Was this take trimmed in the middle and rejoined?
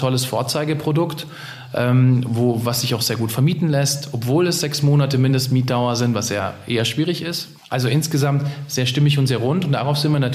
yes; 1 cut; at 7.6 s

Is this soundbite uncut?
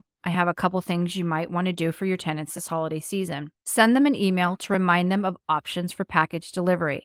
no; 1 cut; at 3.6 s

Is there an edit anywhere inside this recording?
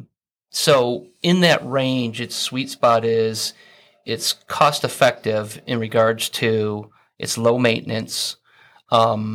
no; 0 cuts

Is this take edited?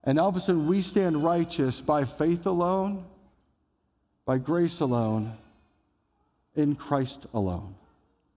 no; 0 cuts

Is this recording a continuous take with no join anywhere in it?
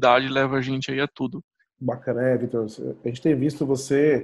yes; 0 cuts

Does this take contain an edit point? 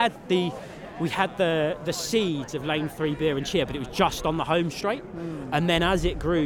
no; 0 cuts

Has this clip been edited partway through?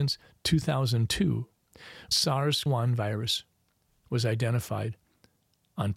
yes; 2 cuts; at 2.1 s, 2.7 s

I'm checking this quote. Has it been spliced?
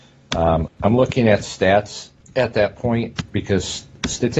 no; 0 cuts

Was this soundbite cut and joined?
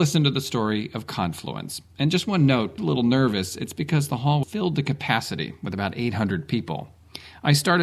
yes; 2 cuts; at 2.8 s, 4.4 s

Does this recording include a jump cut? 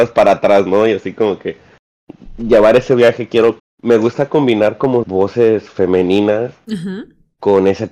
yes; 2 cuts; at 3.6 s, 5.0 s

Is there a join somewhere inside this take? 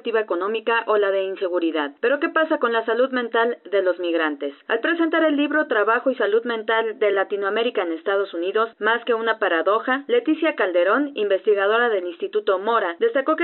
no; 0 cuts

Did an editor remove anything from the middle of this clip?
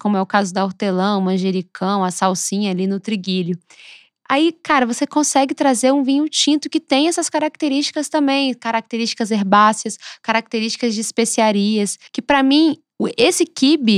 yes; 1 cut; at 12.1 s

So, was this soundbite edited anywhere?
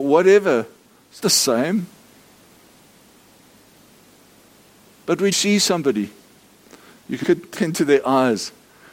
yes; 4 cuts; at 1.2 s, 5.3 s, 7.2 s, 7.5 s

